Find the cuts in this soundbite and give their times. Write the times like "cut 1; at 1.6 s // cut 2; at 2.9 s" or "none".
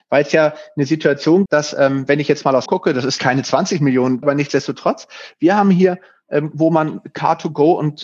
cut 1; at 1.5 s // cut 2; at 2.7 s // cut 3; at 3.2 s // cut 4; at 4.2 s // cut 5; at 6.5 s